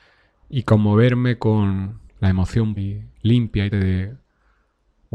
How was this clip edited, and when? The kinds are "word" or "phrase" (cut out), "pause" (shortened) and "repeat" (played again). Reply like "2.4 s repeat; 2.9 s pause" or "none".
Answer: 2.1 s pause; 2.8 s word; 3.1 s pause; 3.7 s word